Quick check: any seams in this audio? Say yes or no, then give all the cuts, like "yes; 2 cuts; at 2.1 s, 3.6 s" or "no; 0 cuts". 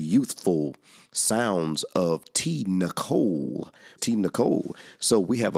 yes; 1 cut; at 4.0 s